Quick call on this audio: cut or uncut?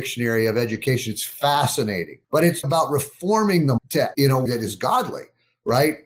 cut